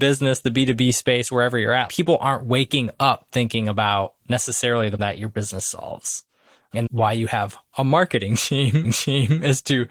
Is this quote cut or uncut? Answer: cut